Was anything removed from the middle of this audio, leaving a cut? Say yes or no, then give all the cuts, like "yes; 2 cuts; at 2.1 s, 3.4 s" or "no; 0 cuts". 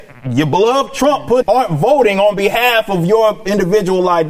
yes; 1 cut; at 1.4 s